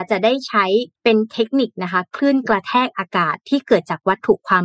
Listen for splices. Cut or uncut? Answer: cut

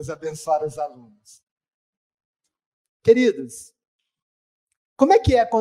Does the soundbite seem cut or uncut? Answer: uncut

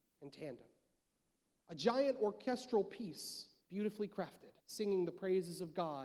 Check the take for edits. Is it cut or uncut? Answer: cut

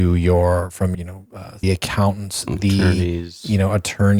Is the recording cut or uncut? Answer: cut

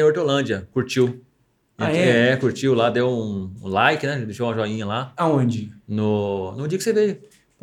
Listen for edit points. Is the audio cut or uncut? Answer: uncut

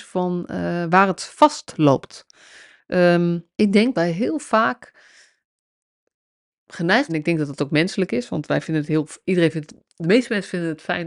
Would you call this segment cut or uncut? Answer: cut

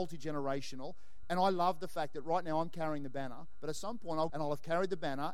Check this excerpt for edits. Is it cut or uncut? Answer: cut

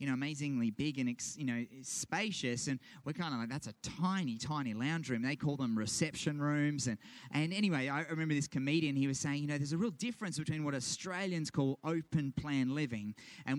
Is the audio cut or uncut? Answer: uncut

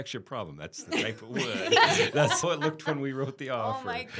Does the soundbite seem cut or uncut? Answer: cut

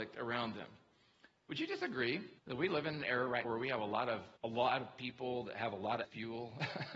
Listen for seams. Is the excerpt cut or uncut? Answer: cut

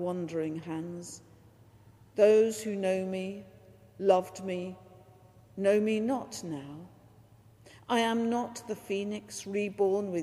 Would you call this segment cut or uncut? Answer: uncut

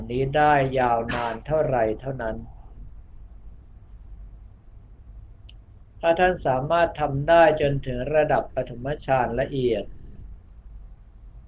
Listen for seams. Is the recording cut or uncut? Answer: uncut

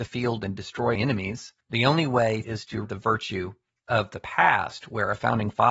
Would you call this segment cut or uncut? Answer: cut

